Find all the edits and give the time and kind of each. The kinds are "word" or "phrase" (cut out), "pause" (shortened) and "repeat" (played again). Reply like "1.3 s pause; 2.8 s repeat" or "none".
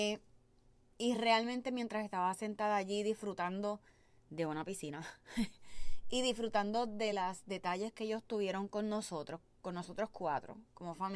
none